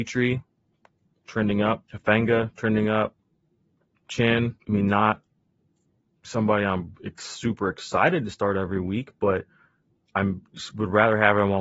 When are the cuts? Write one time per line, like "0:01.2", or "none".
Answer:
0:01.8
0:04.6